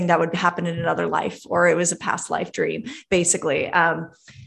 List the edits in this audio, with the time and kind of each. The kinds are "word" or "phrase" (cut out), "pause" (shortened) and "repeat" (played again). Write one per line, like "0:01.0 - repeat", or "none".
none

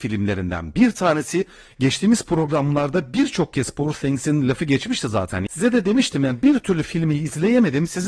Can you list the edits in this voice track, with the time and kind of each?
none

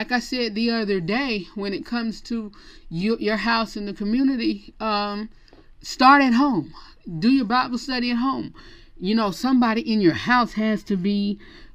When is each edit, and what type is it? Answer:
none

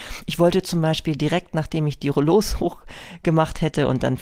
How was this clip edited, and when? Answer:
none

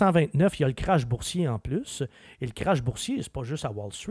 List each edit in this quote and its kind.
none

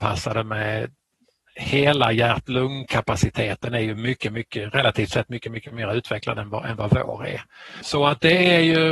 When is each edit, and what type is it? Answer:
none

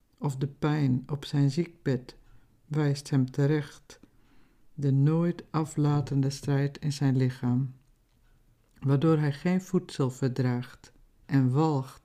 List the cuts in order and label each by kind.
none

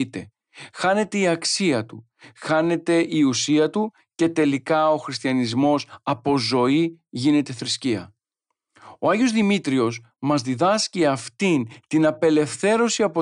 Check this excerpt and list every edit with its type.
none

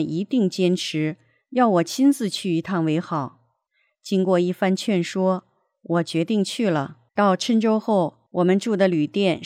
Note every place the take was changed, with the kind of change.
0:07.1 - pause
0:08.3 - pause

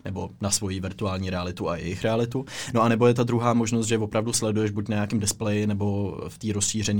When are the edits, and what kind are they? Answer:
none

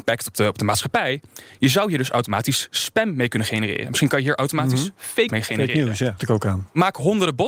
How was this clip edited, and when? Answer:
0:05.3 - word
0:06.2 - word

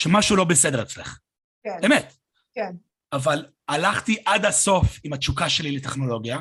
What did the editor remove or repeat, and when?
none

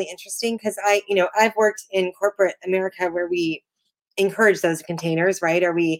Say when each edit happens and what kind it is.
none

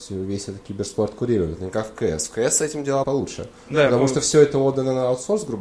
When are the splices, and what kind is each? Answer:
0:03.0 - word

